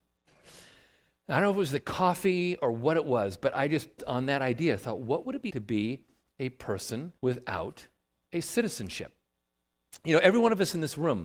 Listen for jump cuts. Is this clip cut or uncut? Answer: cut